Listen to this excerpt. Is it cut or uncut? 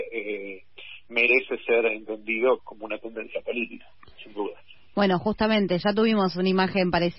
cut